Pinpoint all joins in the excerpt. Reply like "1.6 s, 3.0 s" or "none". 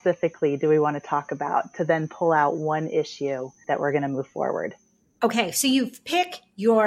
none

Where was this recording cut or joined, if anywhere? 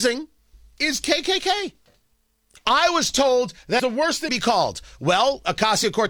2.1 s, 3.8 s, 4.3 s

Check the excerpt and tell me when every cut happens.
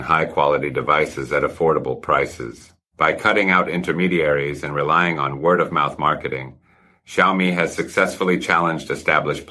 none

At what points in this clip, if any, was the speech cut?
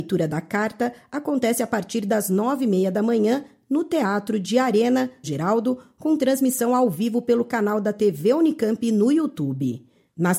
5.2 s

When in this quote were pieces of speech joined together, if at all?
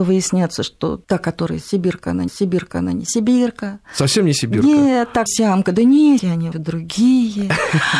1.0 s, 2.3 s, 5.3 s, 6.2 s, 6.5 s

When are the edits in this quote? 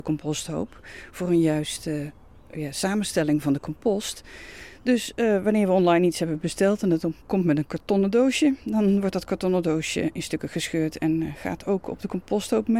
none

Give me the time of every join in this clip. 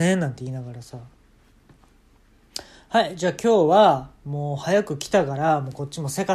none

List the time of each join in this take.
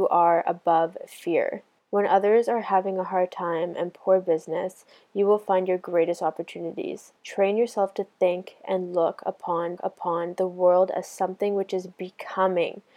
1.8 s, 7.2 s, 9.8 s

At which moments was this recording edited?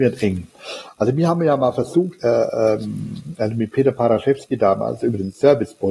2.2 s

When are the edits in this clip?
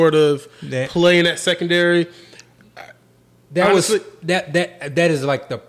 none

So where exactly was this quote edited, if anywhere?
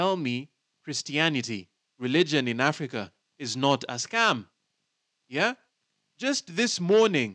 none

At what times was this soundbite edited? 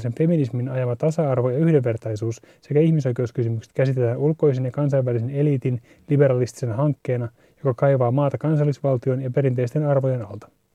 none

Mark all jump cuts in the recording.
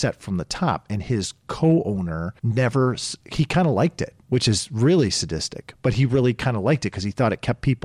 2.4 s, 4.2 s

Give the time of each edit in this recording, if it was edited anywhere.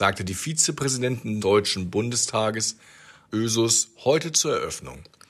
1.4 s, 3.3 s

